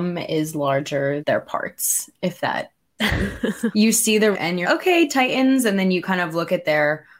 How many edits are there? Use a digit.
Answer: 5